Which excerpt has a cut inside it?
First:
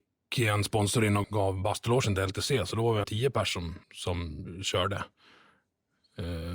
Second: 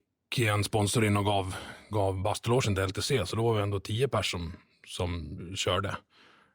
first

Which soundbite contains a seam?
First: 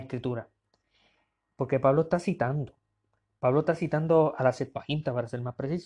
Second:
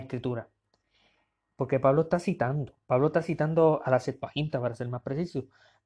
second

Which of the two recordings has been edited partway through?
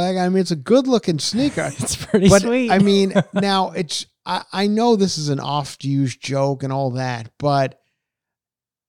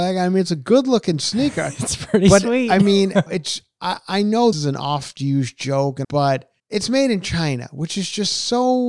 second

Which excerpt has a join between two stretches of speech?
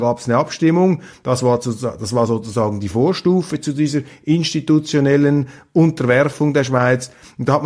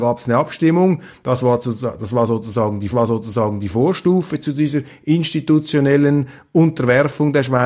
second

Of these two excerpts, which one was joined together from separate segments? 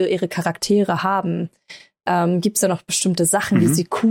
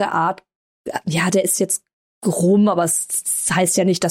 second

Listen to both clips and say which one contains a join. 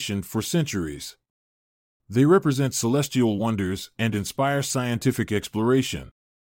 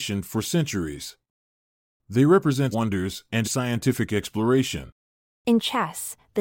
second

